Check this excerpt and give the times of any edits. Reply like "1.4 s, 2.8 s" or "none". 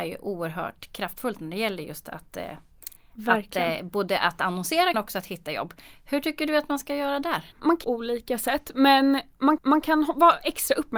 4.9 s, 7.5 s, 7.8 s, 9.6 s